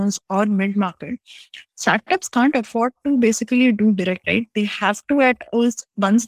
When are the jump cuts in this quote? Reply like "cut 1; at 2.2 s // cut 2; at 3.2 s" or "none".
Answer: cut 1; at 1.7 s // cut 2; at 4.2 s